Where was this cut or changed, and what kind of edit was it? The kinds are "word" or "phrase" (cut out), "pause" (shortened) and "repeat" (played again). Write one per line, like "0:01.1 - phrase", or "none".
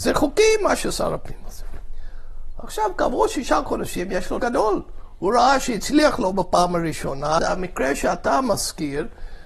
0:04.4 - word
0:07.4 - word